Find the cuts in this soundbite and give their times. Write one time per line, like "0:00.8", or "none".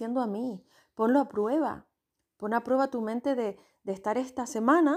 none

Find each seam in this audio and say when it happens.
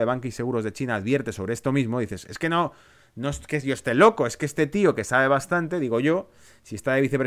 none

